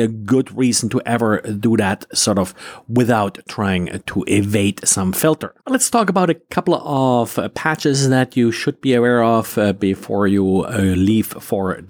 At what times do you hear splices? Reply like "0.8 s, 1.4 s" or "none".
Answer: 5.6 s